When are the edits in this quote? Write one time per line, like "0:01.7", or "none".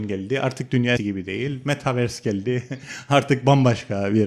0:01.0